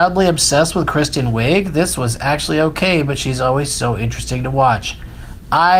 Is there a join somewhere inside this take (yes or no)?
no